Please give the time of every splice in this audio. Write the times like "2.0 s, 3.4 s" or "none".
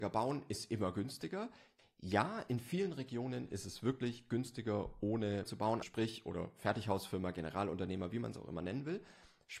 5.5 s, 5.8 s